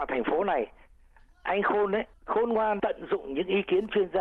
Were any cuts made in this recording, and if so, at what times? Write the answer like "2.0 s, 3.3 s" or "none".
2.1 s, 2.8 s